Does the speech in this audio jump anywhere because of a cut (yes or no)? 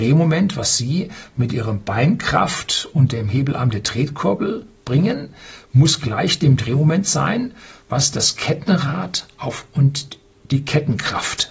no